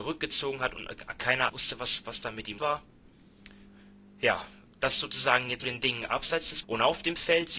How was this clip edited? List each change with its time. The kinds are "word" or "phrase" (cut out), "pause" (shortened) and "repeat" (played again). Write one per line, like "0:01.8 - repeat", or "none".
0:01.5 - word
0:02.6 - word
0:04.7 - word
0:05.6 - word
0:06.6 - word